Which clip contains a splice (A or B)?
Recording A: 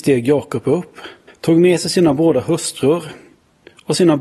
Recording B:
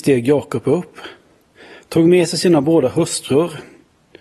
A